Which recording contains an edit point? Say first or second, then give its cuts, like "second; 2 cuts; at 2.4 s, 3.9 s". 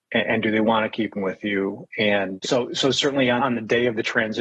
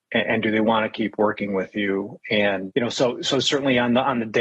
first; 3 cuts; at 1.1 s, 2.4 s, 3.4 s